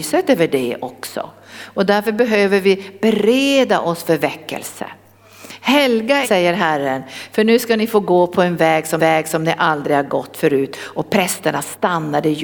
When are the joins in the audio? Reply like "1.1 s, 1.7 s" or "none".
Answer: 6.2 s, 9.0 s